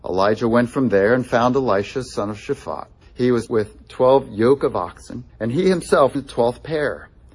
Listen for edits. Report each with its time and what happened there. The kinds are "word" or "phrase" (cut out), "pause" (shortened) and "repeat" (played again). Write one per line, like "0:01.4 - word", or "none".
0:03.0 - pause
0:03.5 - word
0:05.3 - pause
0:06.1 - phrase